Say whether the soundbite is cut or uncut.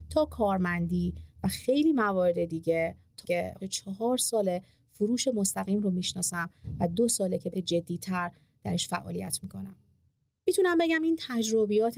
cut